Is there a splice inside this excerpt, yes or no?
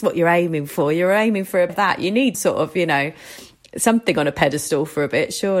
yes